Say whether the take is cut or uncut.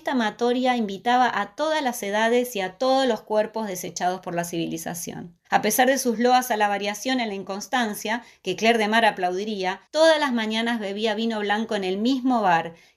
cut